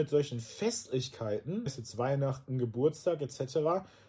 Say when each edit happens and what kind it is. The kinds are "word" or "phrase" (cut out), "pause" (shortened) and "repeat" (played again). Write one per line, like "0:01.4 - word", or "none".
0:01.7 - word